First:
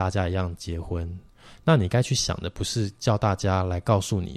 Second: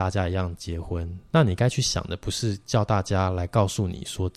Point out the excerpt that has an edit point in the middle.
second; 1 cut; at 1.3 s

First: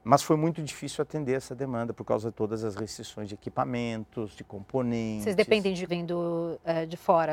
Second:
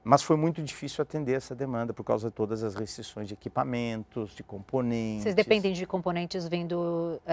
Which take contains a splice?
first; 1 cut; at 5.9 s

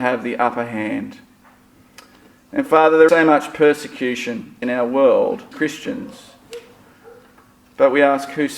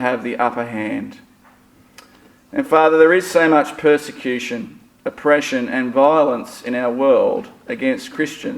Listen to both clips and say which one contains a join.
first; 3 cuts; at 3.1 s, 4.6 s, 5.5 s

